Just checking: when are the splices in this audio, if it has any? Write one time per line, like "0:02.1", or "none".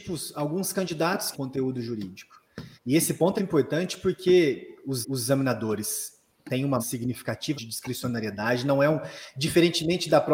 0:01.3
0:02.8
0:03.4
0:05.0
0:06.8
0:07.5